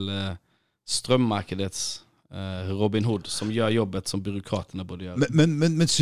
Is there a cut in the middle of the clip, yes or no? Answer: no